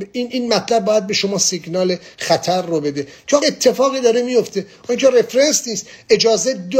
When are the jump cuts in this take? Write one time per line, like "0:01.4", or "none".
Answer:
0:03.4